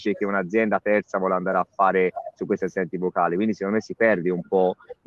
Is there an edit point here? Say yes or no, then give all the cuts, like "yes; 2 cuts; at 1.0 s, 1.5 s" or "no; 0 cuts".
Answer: no; 0 cuts